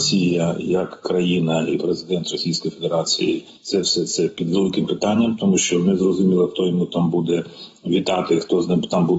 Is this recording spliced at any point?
no; 0 cuts

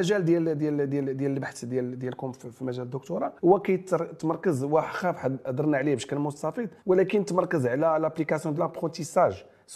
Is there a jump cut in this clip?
yes; 3 cuts; at 3.4 s, 6.8 s, 8.6 s

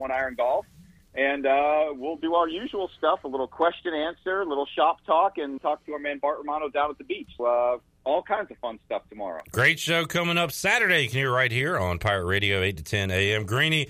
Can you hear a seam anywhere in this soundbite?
yes; 2 cuts; at 5.6 s, 7.4 s

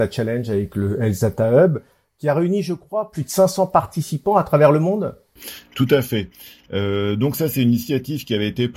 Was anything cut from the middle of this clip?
no; 0 cuts

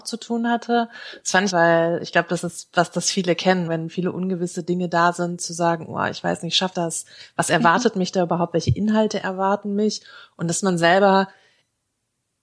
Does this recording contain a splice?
yes; 3 cuts; at 1.5 s, 3.7 s, 6.7 s

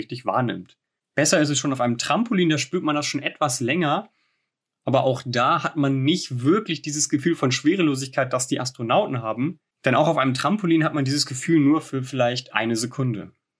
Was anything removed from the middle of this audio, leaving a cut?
no; 0 cuts

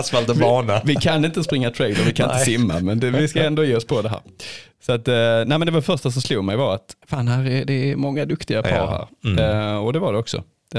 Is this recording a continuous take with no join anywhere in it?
no; 1 cut; at 7.0 s

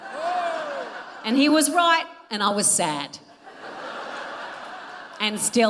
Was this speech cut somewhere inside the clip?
no; 0 cuts

